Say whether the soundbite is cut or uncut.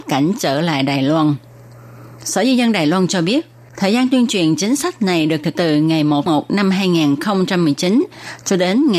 cut